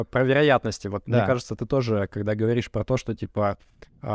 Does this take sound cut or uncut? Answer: uncut